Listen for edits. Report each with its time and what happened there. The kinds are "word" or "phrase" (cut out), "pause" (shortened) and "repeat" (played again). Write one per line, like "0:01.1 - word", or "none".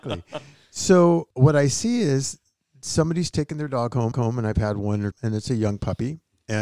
0:01.3 - pause
0:04.1 - repeat
0:05.1 - phrase